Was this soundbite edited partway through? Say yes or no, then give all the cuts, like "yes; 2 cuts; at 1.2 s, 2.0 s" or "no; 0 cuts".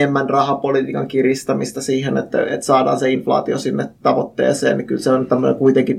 no; 0 cuts